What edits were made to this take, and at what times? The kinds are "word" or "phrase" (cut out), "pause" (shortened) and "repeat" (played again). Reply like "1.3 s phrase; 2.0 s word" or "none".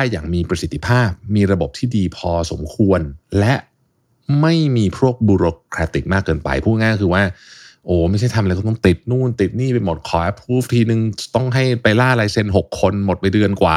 none